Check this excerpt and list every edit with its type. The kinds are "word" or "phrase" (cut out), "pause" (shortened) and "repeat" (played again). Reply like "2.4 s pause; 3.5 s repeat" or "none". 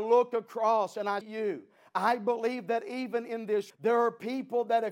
1.2 s word; 3.7 s word